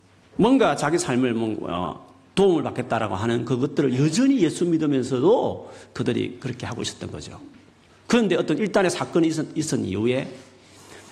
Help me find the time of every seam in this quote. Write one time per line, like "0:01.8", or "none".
none